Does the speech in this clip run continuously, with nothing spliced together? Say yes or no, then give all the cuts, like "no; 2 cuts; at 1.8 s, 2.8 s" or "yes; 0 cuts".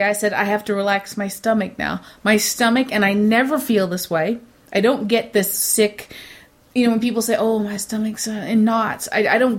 yes; 0 cuts